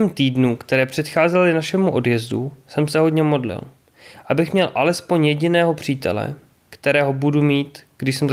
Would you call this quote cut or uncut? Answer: uncut